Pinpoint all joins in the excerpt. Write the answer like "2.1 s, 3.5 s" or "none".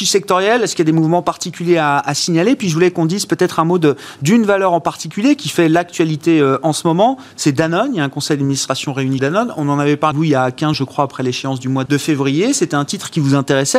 9.2 s, 10.1 s, 10.7 s, 11.9 s